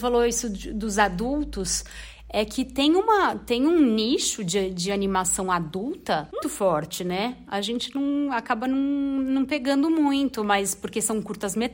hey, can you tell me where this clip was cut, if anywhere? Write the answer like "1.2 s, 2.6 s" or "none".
6.4 s